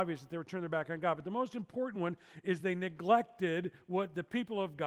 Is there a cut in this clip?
no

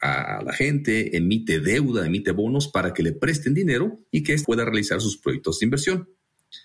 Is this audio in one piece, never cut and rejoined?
no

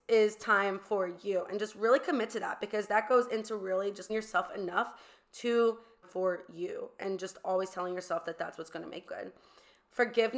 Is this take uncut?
no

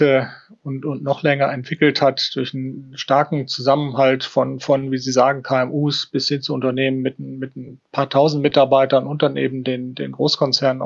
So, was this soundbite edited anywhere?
no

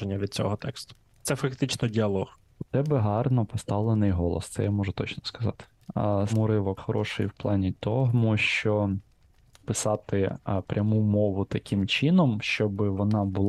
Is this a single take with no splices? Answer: no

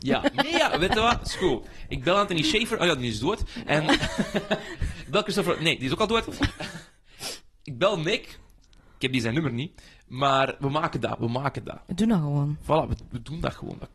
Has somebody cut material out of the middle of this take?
no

